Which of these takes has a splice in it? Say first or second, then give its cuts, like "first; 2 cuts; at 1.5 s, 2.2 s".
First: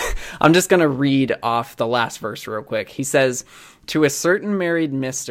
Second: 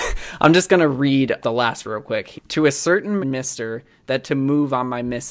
second; 5 cuts; at 1.4 s, 1.8 s, 2.3 s, 3.2 s, 4.2 s